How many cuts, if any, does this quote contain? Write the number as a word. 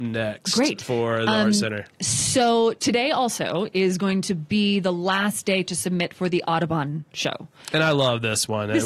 one